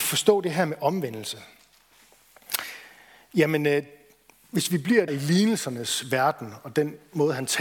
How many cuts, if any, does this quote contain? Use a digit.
1